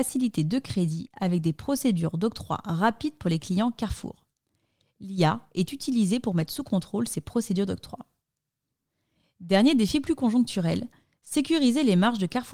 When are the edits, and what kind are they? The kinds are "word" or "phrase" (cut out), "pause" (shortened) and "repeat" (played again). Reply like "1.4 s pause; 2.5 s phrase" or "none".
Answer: none